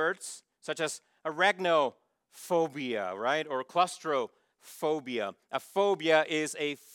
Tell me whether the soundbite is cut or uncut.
uncut